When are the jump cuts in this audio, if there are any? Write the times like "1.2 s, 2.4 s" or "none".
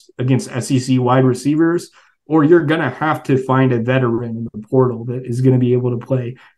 none

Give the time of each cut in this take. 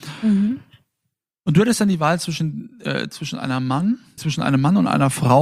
4.2 s

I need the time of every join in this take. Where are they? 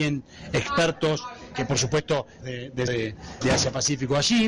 1.5 s, 2.4 s, 2.9 s, 3.4 s

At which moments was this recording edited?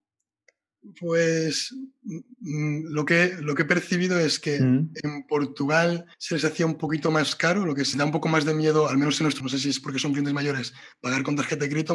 6.1 s, 7.9 s, 9.4 s

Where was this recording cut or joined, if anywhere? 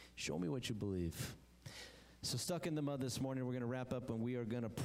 none

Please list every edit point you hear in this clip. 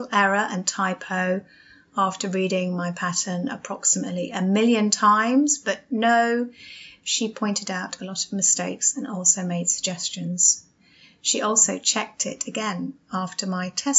none

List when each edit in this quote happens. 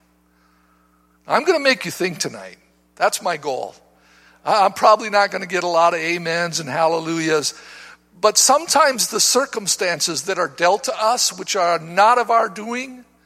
none

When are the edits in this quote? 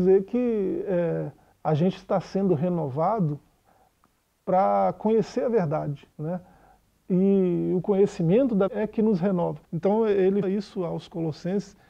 1.5 s, 6.1 s, 8.7 s, 9.6 s, 10.4 s

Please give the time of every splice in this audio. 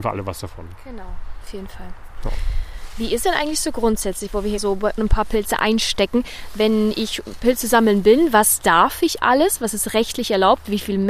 3.2 s, 4.6 s, 5.0 s

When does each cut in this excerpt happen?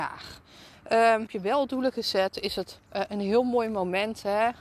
1.3 s, 2.9 s

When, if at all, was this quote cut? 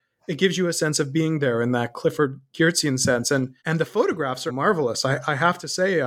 3.6 s, 4.5 s

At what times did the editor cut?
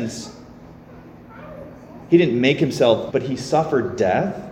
3.1 s

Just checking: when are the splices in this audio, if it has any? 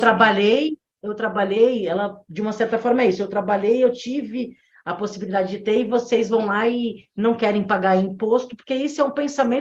none

